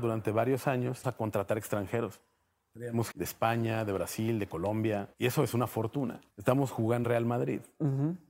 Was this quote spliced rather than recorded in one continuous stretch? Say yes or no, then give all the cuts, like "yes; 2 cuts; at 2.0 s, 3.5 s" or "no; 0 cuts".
yes; 5 cuts; at 1.0 s, 3.1 s, 5.1 s, 6.3 s, 7.0 s